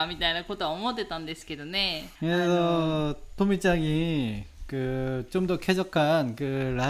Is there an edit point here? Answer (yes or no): yes